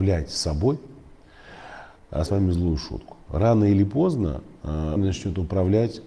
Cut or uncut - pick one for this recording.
cut